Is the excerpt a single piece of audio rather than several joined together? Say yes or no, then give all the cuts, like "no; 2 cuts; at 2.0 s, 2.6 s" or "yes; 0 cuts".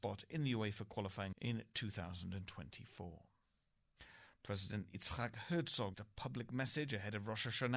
no; 2 cuts; at 1.3 s, 5.9 s